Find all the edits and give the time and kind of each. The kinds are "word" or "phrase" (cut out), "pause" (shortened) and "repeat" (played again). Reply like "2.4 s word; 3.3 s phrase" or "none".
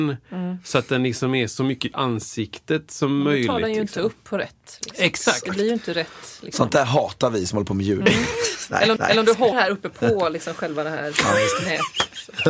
1.9 s word; 9.0 s repeat; 9.5 s word

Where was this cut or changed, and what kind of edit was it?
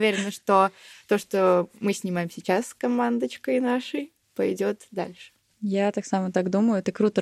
4.2 s pause; 5.4 s pause

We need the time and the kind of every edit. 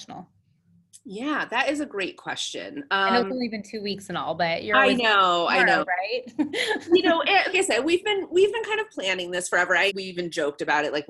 7.5 s word; 9.9 s word

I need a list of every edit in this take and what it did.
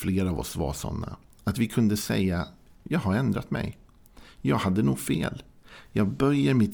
none

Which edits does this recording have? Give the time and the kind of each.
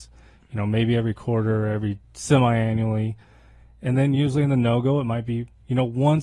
none

